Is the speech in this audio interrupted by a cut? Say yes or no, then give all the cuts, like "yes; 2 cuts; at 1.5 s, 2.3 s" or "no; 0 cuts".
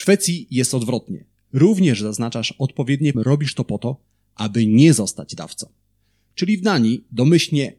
yes; 1 cut; at 3.1 s